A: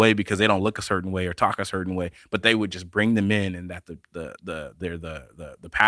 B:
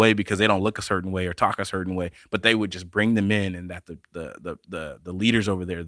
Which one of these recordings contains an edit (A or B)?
A